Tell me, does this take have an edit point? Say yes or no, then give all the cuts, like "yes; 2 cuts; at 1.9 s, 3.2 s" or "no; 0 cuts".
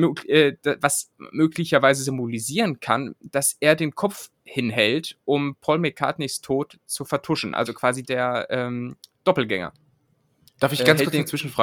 yes; 1 cut; at 8.0 s